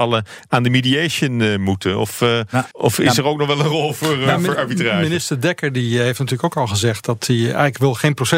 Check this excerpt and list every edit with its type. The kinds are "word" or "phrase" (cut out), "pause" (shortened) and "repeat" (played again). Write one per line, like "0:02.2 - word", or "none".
0:02.7 - pause